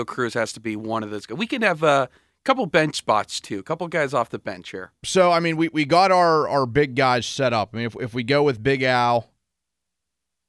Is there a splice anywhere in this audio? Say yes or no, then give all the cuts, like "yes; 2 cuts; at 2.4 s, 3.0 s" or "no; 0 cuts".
no; 0 cuts